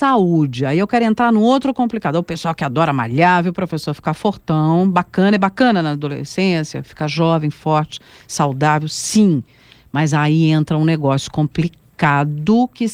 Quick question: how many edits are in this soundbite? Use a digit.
0